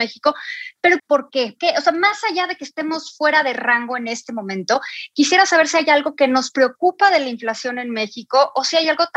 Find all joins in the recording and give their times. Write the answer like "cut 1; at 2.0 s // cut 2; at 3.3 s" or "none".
cut 1; at 1.0 s // cut 2; at 1.6 s

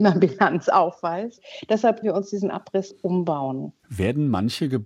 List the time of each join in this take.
cut 1; at 2.0 s // cut 2; at 2.9 s // cut 3; at 3.8 s

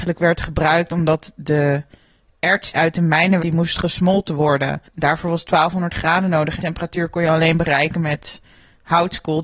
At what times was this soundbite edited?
cut 1; at 2.7 s // cut 2; at 3.4 s // cut 3; at 4.8 s // cut 4; at 6.6 s

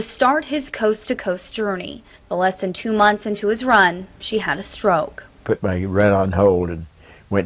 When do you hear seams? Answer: cut 1; at 4.1 s // cut 2; at 5.3 s

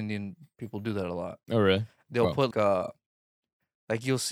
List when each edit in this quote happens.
cut 1; at 2.5 s

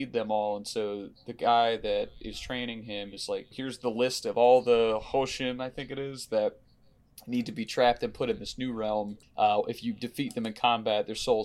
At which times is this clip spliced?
cut 1; at 3.5 s // cut 2; at 9.2 s

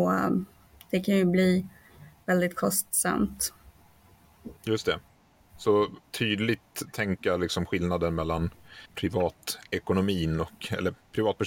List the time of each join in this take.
cut 1; at 4.6 s // cut 2; at 6.0 s // cut 3; at 8.9 s

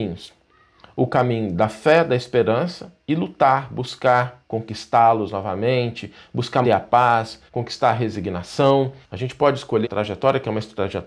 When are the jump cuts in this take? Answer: cut 1; at 6.6 s // cut 2; at 7.5 s // cut 3; at 9.0 s // cut 4; at 9.8 s

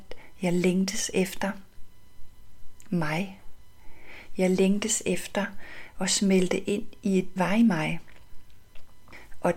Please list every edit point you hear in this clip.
cut 1; at 7.4 s

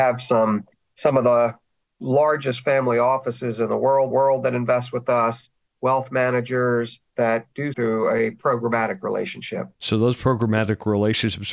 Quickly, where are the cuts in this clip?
cut 1; at 4.1 s // cut 2; at 7.1 s // cut 3; at 7.7 s // cut 4; at 9.7 s

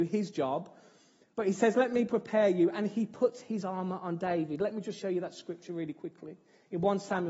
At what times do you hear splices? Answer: none

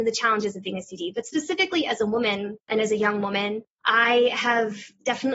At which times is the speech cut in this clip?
cut 1; at 2.6 s // cut 2; at 3.7 s

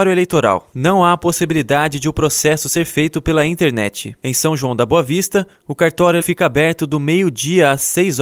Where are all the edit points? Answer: cut 1; at 6.2 s

